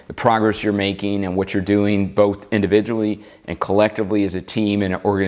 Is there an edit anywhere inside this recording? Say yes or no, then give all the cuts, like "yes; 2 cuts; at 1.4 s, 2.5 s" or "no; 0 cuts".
no; 0 cuts